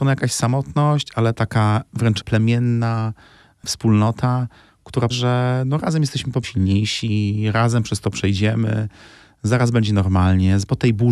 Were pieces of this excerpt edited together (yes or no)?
yes